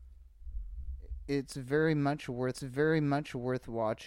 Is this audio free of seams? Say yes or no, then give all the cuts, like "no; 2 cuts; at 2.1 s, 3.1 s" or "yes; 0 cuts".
no; 1 cut; at 2.5 s